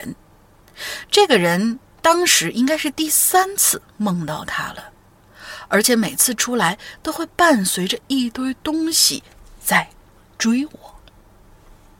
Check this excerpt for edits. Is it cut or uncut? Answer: uncut